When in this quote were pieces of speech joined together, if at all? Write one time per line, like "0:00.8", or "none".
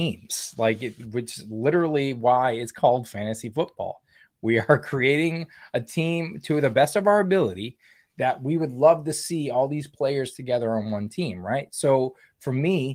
none